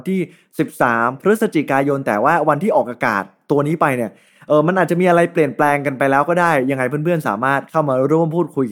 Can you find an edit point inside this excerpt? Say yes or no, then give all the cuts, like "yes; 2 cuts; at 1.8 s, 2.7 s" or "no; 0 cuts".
no; 0 cuts